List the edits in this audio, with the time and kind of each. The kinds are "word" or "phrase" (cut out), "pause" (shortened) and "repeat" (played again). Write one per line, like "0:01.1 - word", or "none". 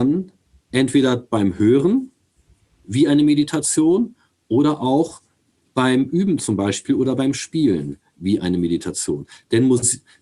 none